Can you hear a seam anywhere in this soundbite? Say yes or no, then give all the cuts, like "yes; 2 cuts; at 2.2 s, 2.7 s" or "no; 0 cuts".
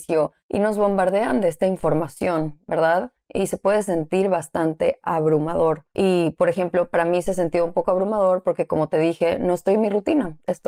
no; 0 cuts